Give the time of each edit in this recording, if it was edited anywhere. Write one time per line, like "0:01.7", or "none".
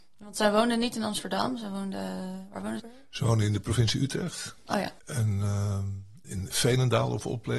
0:02.8
0:05.0
0:06.5